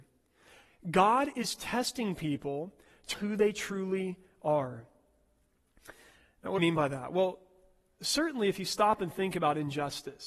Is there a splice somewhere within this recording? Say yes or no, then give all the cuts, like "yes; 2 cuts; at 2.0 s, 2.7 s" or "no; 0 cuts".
yes; 2 cuts; at 3.1 s, 6.6 s